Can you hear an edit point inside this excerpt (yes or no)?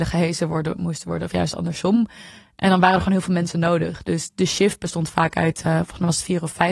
no